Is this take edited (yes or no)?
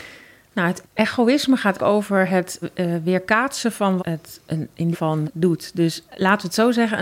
yes